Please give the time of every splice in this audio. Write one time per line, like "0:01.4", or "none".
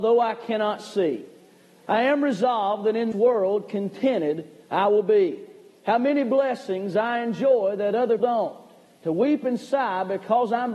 0:03.1
0:08.2